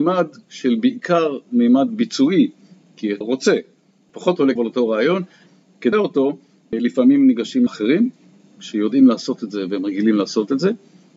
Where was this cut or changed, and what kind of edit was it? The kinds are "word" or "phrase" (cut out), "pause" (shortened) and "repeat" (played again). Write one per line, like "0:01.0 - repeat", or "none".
0:03.2 - phrase
0:04.6 - phrase
0:05.9 - word
0:07.7 - word